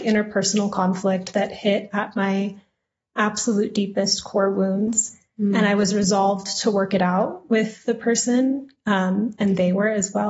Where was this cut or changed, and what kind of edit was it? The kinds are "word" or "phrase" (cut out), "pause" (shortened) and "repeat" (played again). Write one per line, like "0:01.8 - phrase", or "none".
none